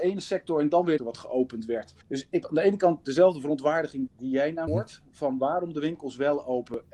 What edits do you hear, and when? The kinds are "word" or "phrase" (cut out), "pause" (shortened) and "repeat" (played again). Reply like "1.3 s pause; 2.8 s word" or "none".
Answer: 1.0 s phrase; 2.0 s pause; 2.4 s word; 4.1 s word; 4.7 s phrase